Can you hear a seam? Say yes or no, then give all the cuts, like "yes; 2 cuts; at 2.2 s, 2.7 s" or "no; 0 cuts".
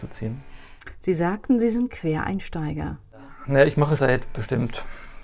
yes; 1 cut; at 4.0 s